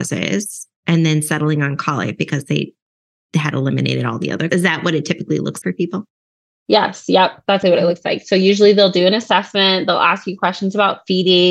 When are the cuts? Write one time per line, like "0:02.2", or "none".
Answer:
0:04.5
0:05.6
0:07.6